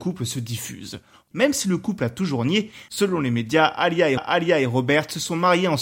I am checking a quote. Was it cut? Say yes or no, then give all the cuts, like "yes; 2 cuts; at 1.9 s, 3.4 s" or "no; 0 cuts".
yes; 1 cut; at 4.2 s